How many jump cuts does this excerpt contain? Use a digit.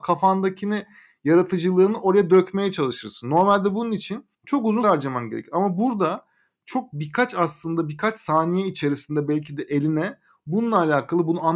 2